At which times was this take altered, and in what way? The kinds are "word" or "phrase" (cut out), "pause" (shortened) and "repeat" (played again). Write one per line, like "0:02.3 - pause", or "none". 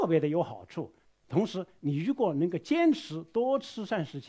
0:01.1 - pause